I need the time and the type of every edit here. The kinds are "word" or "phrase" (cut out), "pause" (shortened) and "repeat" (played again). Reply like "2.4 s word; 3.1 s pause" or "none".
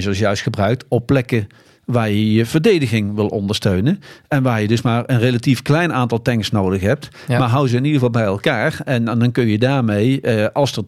none